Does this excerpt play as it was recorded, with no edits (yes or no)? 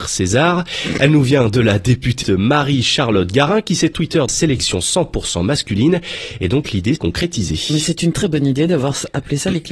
no